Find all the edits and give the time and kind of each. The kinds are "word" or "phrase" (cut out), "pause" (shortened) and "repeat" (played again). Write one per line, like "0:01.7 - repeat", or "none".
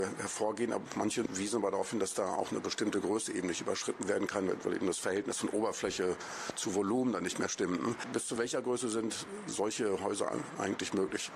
none